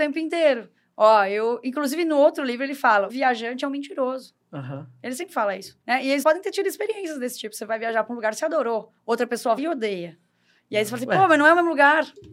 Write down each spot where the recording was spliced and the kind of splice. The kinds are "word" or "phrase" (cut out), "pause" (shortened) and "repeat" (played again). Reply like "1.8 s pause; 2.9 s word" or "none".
3.1 s word; 5.8 s pause; 6.2 s word; 9.0 s pause; 9.6 s word